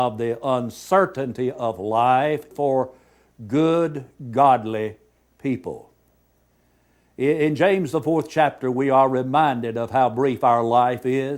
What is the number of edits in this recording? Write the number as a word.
one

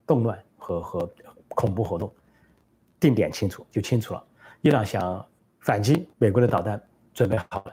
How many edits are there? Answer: two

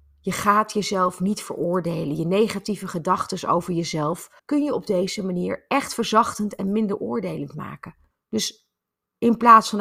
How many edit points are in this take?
two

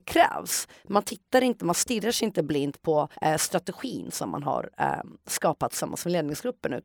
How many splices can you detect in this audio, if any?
one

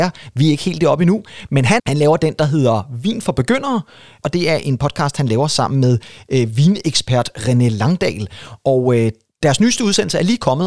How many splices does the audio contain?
one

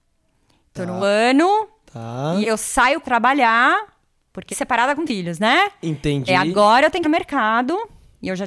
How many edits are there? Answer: seven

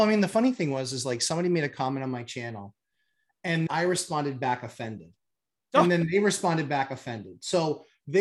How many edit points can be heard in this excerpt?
one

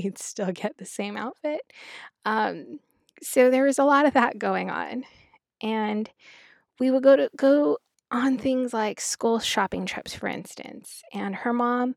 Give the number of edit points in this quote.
zero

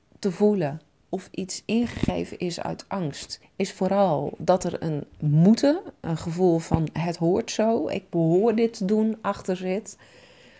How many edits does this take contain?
one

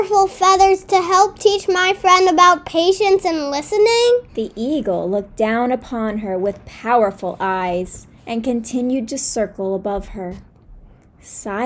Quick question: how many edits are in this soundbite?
two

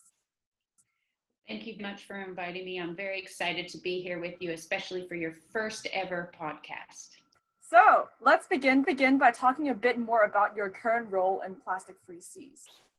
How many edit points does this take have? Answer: three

